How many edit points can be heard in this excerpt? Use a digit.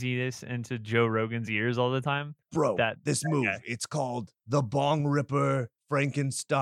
0